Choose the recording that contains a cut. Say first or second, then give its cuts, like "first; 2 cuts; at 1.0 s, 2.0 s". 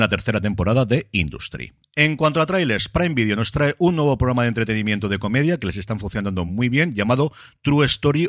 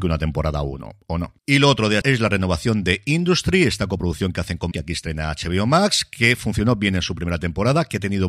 second; 3 cuts; at 1.4 s, 2.0 s, 4.7 s